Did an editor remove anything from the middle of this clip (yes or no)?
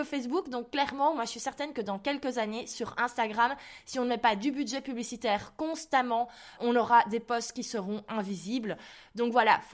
yes